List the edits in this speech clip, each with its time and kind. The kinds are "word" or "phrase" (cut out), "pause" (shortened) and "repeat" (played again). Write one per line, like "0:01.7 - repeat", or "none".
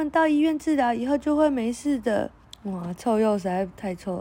0:02.4 - pause